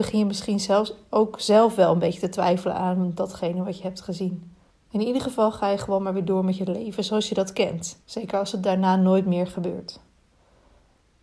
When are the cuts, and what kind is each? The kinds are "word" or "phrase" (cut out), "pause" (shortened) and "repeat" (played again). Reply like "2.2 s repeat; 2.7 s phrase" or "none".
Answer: 4.7 s pause; 8.0 s pause